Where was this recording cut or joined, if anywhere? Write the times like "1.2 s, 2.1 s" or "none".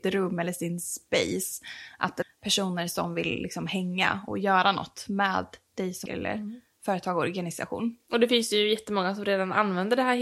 2.2 s, 4.3 s, 6.1 s